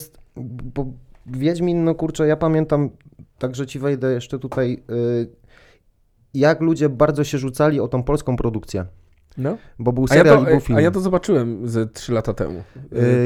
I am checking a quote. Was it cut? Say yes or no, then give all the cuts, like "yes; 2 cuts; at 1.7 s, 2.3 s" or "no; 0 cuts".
no; 0 cuts